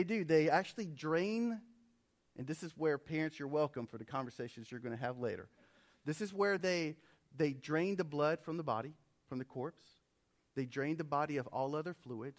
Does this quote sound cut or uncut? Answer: uncut